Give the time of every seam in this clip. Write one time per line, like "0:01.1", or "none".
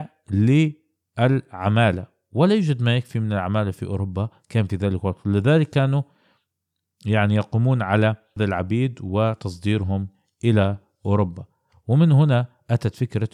0:08.4